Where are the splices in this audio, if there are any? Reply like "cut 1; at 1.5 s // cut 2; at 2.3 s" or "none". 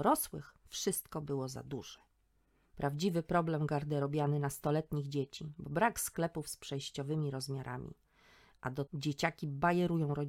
cut 1; at 8.9 s